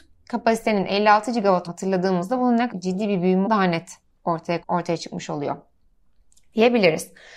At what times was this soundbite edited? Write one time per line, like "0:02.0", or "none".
0:01.7
0:02.7
0:03.4
0:04.6